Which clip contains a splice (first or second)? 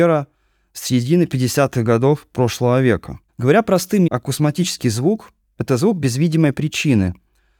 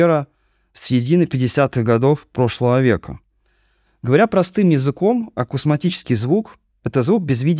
first